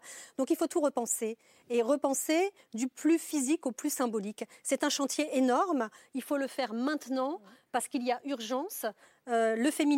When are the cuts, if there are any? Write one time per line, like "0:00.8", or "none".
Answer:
none